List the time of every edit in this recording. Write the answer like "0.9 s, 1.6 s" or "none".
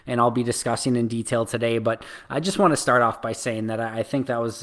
none